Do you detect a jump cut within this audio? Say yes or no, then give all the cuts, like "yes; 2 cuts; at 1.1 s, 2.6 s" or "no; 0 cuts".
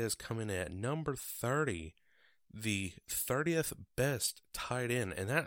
no; 0 cuts